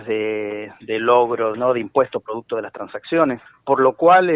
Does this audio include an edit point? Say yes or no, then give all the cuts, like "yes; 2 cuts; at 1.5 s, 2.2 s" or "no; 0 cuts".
yes; 2 cuts; at 1.5 s, 3.5 s